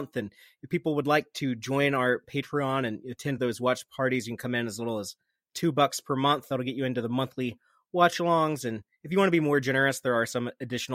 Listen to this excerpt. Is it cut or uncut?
uncut